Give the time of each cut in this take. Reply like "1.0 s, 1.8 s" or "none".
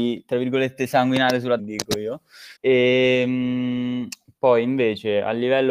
1.6 s, 2.6 s